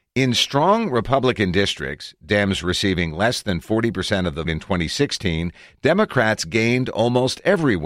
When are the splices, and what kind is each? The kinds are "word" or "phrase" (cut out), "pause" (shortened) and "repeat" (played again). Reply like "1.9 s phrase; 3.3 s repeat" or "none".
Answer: 4.5 s word